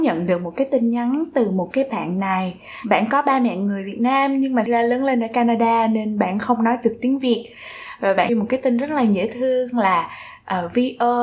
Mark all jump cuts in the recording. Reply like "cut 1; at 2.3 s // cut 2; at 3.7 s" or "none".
cut 1; at 4.7 s // cut 2; at 8.3 s